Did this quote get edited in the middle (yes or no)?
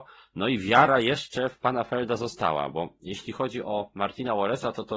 no